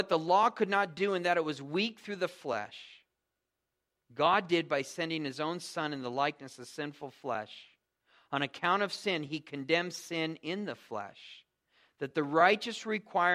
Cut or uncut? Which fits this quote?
uncut